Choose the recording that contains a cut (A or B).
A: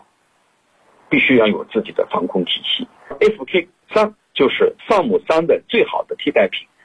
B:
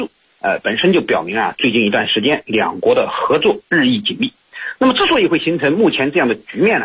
A